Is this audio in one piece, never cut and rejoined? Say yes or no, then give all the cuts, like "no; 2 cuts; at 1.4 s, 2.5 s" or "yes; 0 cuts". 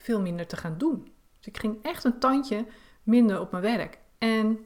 yes; 0 cuts